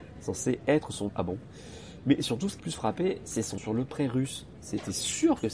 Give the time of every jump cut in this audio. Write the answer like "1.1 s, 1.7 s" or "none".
1.1 s, 2.6 s, 3.6 s

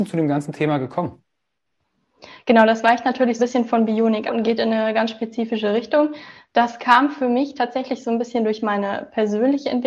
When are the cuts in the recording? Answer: 3.4 s, 4.3 s

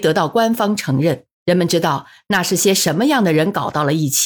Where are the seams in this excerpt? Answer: 1.3 s

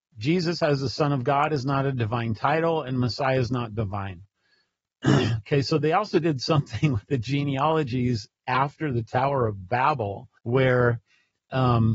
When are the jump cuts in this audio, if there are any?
10.4 s

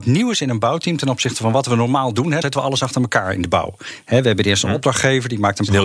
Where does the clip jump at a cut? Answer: 2.4 s

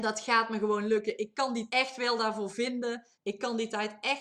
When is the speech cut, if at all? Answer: 1.7 s, 3.1 s

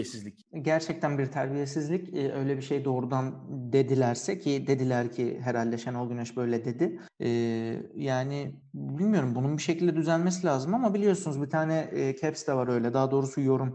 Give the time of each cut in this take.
none

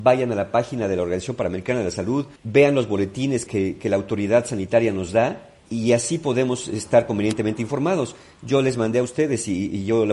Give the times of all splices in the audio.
2.4 s, 3.5 s, 5.6 s

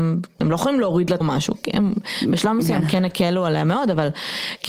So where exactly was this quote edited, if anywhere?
1.2 s

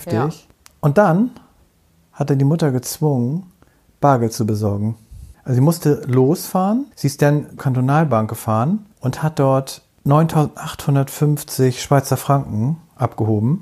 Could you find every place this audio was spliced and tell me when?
5.3 s, 6.9 s, 7.6 s

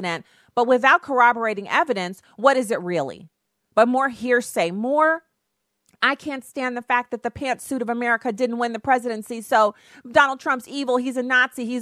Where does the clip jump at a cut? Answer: none

